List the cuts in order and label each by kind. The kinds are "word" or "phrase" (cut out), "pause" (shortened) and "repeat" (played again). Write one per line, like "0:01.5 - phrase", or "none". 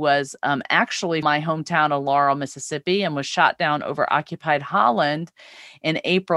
0:01.2 - word